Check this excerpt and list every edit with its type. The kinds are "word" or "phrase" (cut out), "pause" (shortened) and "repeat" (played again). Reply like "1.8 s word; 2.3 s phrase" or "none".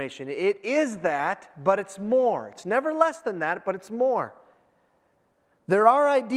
none